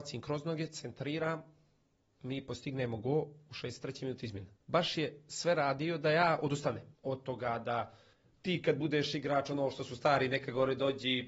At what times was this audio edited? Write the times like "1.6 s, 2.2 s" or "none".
4.6 s, 6.9 s, 8.1 s